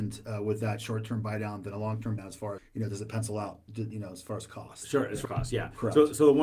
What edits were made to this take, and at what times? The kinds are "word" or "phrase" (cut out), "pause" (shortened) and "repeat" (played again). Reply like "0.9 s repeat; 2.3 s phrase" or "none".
2.2 s word; 2.6 s word; 3.7 s word; 5.2 s word